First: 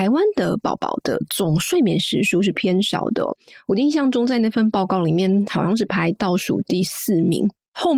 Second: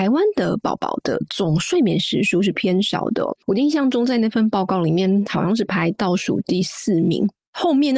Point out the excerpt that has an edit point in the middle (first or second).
second